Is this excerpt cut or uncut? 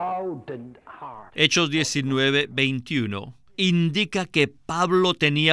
cut